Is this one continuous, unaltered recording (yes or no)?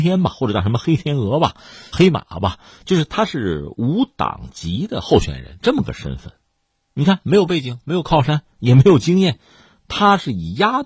no